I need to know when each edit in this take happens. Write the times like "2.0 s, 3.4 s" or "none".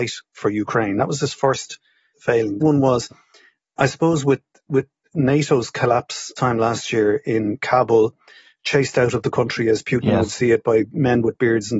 2.1 s, 2.6 s, 6.4 s